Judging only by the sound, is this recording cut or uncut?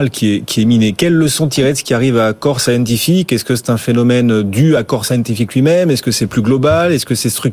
uncut